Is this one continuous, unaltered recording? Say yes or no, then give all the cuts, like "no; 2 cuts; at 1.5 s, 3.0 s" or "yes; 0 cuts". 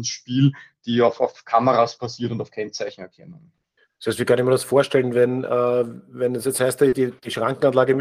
no; 1 cut; at 3.8 s